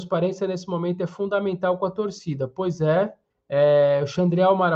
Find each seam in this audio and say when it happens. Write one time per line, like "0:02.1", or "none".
0:03.3